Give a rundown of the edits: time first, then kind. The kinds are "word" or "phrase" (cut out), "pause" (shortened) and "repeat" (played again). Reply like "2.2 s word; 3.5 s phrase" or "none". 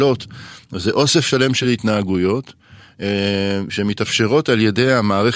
none